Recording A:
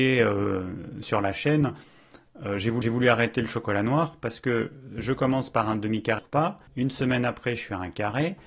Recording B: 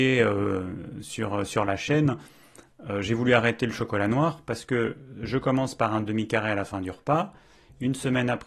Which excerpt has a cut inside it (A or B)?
A